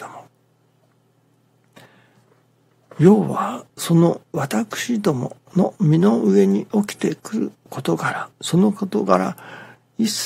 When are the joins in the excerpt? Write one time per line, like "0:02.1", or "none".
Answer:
0:03.7
0:07.6
0:08.3